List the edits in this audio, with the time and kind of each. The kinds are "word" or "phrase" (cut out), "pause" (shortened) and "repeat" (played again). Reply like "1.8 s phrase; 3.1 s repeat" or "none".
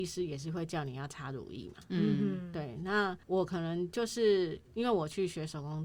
3.2 s pause; 4.6 s pause